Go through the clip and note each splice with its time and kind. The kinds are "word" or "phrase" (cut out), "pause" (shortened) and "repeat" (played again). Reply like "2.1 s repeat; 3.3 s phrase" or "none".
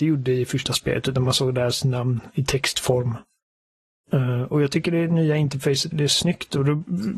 5.9 s word